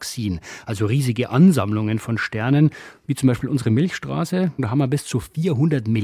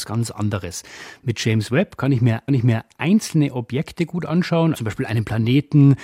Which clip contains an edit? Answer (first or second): second